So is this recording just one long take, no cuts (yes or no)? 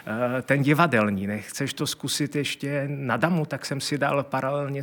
yes